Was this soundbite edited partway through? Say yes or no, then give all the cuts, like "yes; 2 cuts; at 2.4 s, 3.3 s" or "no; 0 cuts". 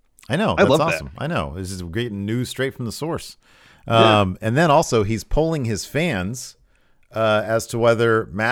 no; 0 cuts